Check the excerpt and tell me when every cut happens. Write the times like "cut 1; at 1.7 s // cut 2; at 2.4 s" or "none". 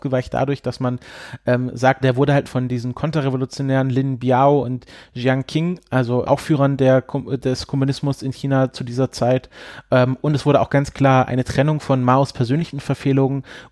cut 1; at 2.0 s // cut 2; at 2.4 s // cut 3; at 6.2 s